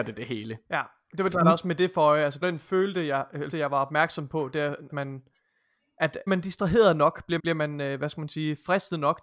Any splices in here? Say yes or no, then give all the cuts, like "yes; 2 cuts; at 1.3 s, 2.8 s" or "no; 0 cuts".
yes; 6 cuts; at 1.3 s, 2.4 s, 3.5 s, 4.9 s, 6.3 s, 7.4 s